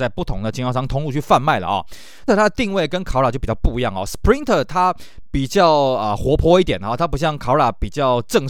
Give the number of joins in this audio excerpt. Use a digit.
1